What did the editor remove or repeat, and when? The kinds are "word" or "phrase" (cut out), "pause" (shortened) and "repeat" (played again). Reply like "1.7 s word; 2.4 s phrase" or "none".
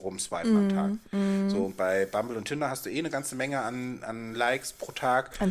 none